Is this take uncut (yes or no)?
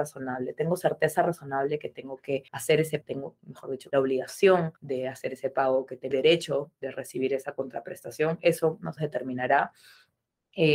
no